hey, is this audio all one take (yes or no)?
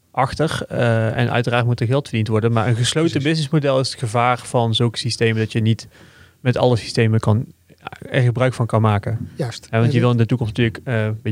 yes